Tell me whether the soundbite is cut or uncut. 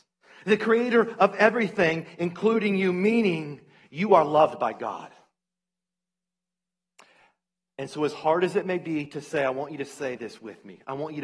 uncut